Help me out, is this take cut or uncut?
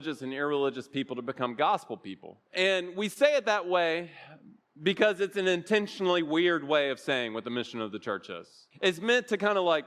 cut